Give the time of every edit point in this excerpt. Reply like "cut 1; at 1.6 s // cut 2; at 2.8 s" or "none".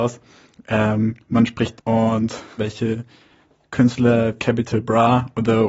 cut 1; at 1.2 s // cut 2; at 1.8 s // cut 3; at 2.6 s // cut 4; at 4.4 s